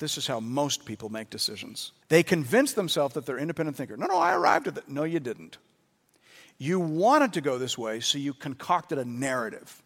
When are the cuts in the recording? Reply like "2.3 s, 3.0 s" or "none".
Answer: 2.0 s